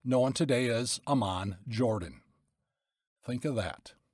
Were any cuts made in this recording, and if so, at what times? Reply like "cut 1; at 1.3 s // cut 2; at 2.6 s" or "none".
none